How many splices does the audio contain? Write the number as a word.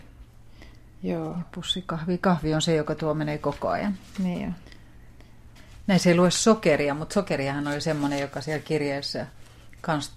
zero